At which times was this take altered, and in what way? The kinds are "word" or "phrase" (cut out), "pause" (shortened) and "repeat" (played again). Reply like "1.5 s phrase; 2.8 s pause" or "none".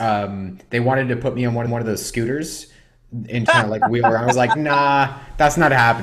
1.7 s repeat; 3.5 s word